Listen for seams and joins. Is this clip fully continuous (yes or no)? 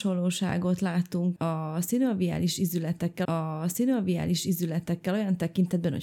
no